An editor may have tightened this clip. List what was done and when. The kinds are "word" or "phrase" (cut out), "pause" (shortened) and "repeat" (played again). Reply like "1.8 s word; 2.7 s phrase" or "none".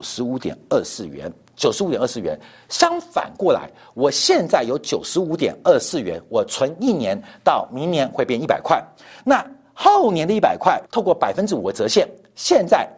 10.9 s pause